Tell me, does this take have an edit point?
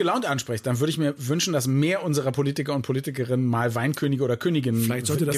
no; 0 cuts

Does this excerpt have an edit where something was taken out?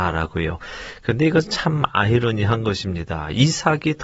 no; 0 cuts

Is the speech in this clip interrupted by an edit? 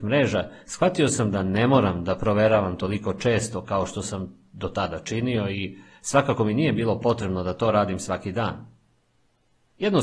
no; 0 cuts

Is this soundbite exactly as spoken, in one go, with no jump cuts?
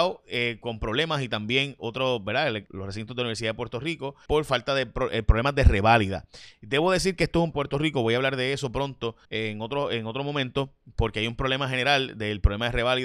no; 5 cuts; at 1.8 s, 2.7 s, 4.3 s, 7.5 s, 9.2 s

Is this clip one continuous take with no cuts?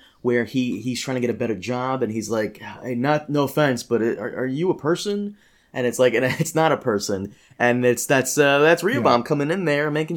yes; 0 cuts

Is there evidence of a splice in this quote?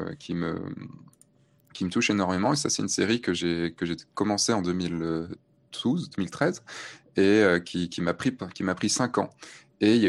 no; 0 cuts

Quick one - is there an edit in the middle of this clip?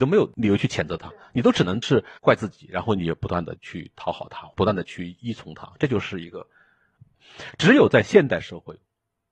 yes; 1 cut; at 2.2 s

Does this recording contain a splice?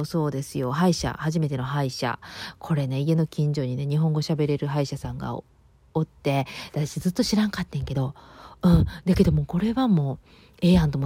no; 0 cuts

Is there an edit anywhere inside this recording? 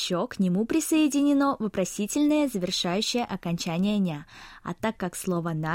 no; 0 cuts

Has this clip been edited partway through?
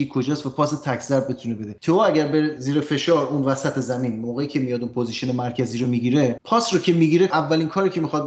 no; 0 cuts

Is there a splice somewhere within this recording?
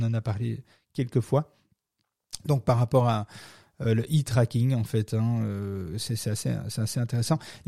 no; 0 cuts

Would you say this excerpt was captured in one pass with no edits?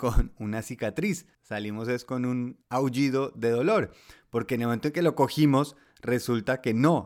no; 2 cuts; at 1.3 s, 2.6 s

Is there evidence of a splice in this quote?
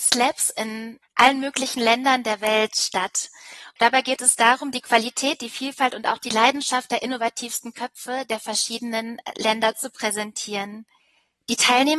no; 0 cuts

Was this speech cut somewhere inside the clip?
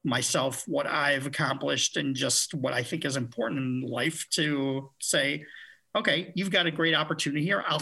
no; 0 cuts

